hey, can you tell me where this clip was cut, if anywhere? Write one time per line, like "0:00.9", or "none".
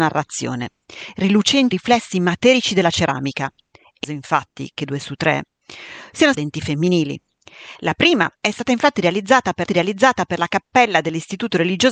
0:01.7
0:04.0
0:05.0
0:06.3
0:08.3
0:09.7